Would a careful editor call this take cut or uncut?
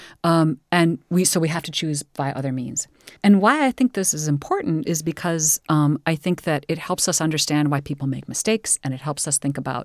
cut